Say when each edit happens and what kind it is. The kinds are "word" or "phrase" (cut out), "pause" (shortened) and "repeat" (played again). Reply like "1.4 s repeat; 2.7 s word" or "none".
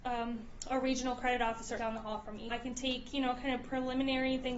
1.8 s word; 2.5 s word